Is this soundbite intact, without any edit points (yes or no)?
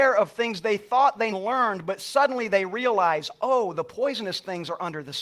no